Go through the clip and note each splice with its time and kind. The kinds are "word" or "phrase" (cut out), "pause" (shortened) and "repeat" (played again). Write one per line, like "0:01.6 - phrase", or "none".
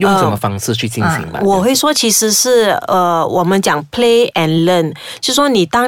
none